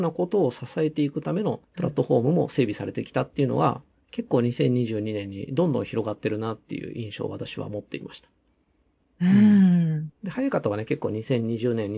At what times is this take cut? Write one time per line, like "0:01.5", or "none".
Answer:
0:01.6
0:04.0
0:10.1